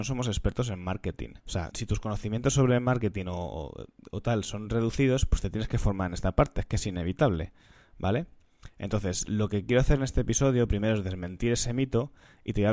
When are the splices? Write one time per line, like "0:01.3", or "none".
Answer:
0:01.4
0:01.7